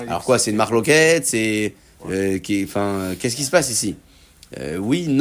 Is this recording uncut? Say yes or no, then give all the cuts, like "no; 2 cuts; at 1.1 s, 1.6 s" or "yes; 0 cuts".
yes; 0 cuts